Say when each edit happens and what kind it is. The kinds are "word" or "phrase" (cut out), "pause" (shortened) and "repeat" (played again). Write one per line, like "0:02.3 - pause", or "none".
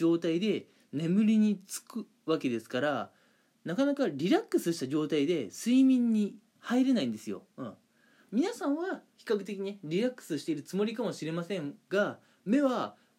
0:06.6 - phrase